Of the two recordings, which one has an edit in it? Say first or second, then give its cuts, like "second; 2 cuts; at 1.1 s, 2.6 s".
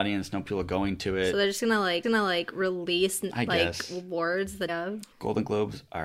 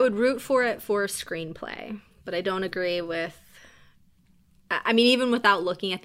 first; 3 cuts; at 2.0 s, 4.7 s, 5.1 s